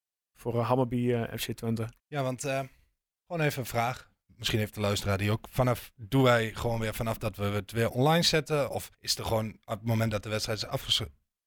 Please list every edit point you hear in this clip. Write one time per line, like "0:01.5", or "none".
0:02.0
0:08.9